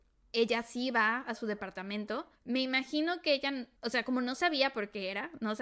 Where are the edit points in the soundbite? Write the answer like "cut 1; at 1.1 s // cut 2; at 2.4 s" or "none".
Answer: cut 1; at 2.4 s // cut 2; at 3.8 s